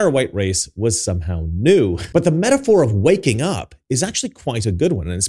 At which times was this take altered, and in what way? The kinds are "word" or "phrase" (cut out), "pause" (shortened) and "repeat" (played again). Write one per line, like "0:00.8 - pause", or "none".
none